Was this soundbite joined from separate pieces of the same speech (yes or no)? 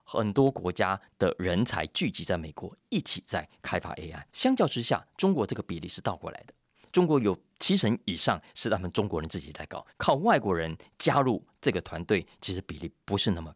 yes